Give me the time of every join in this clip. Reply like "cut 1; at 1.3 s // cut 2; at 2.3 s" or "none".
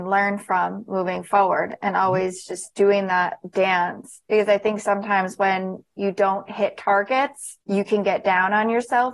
cut 1; at 4.3 s // cut 2; at 7.6 s